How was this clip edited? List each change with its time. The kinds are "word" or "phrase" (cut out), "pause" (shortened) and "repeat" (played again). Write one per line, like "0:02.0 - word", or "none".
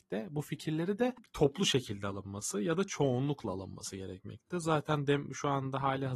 none

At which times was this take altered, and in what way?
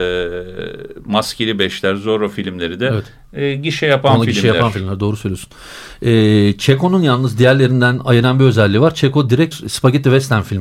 0:09.5 - word

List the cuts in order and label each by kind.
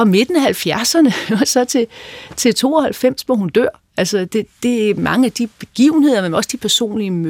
none

